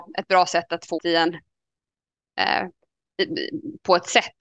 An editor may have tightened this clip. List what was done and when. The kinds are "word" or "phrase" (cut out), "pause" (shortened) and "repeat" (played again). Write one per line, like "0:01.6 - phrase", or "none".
0:01.0 - phrase